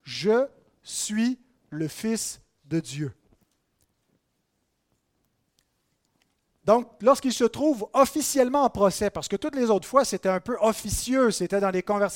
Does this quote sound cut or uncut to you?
uncut